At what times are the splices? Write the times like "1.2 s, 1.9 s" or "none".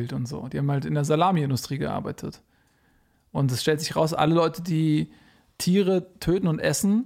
none